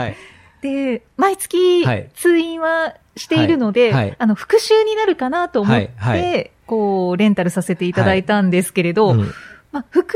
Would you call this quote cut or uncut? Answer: cut